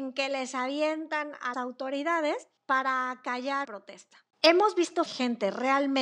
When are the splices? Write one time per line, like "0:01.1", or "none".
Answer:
0:01.5
0:02.6
0:03.6
0:04.3
0:05.1